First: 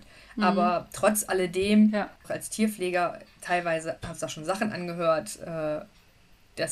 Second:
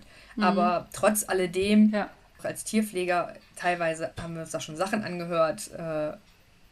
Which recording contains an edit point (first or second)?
first